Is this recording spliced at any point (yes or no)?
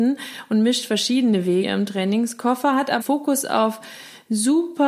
yes